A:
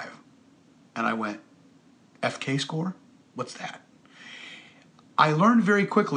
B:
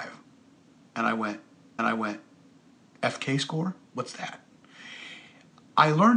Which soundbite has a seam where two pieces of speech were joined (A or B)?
B